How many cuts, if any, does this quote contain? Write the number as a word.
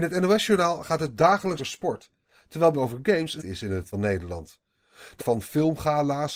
five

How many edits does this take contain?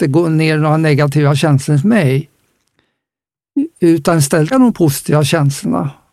one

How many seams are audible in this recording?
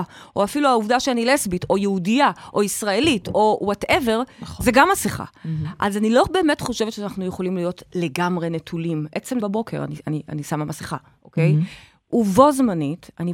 one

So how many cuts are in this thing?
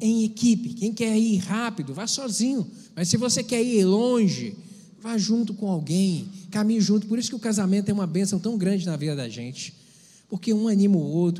one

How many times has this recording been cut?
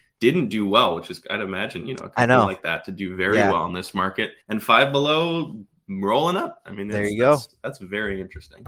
one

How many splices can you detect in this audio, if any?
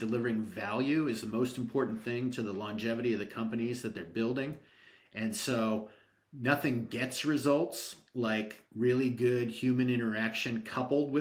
one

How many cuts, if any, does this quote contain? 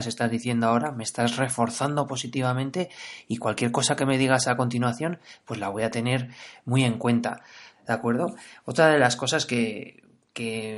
zero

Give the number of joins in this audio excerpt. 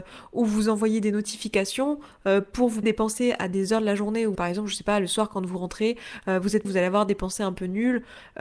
three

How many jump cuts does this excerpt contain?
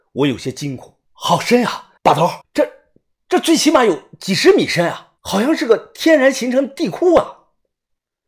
four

